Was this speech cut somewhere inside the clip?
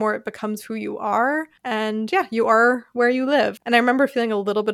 no; 0 cuts

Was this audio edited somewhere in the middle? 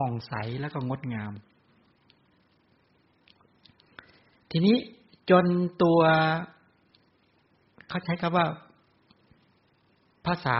no; 0 cuts

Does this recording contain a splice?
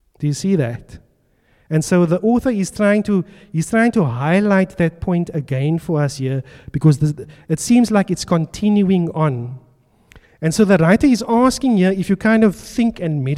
no; 0 cuts

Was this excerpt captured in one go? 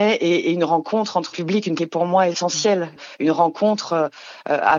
no; 2 cuts; at 1.3 s, 1.8 s

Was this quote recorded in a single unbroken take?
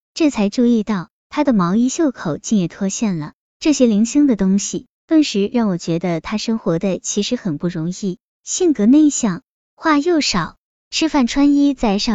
yes; 0 cuts

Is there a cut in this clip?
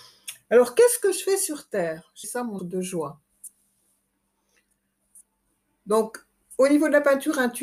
yes; 2 cuts; at 2.2 s, 2.6 s

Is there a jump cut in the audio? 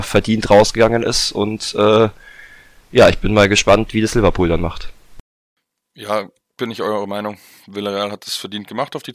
yes; 1 cut; at 6.4 s

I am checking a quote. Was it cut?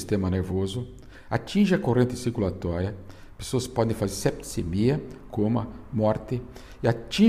no; 0 cuts

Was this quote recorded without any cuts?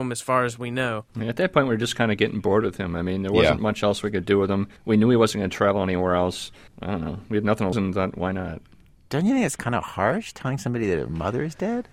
no; 4 cuts; at 1.1 s, 4.8 s, 6.7 s, 7.7 s

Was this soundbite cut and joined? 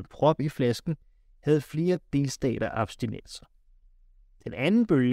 no; 0 cuts

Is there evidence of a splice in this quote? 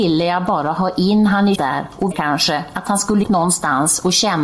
yes; 3 cuts; at 1.5 s, 2.1 s, 3.2 s

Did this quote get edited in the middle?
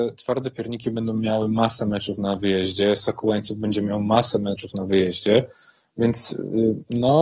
no; 0 cuts

